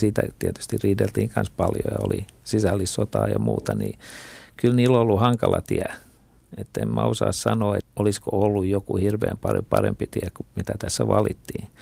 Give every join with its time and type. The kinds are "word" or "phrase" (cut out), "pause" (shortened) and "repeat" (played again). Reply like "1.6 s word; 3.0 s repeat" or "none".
7.8 s word; 10.4 s word